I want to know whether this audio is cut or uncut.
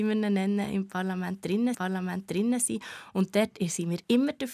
cut